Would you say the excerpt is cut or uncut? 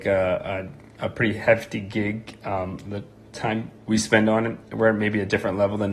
cut